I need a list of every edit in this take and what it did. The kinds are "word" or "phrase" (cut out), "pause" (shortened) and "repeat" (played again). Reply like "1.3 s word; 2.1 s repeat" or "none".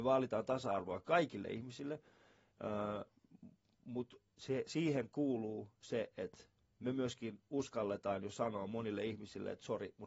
none